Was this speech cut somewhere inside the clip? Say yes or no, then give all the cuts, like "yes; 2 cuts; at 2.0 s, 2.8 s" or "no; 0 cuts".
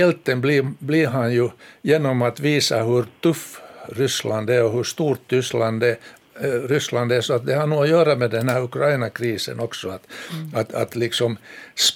no; 0 cuts